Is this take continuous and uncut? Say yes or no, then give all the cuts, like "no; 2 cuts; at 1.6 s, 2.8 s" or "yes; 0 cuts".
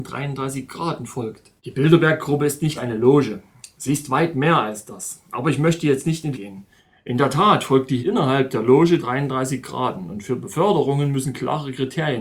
no; 5 cuts; at 1.6 s, 2.8 s, 6.3 s, 8.0 s, 9.0 s